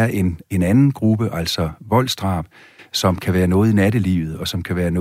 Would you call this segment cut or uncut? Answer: uncut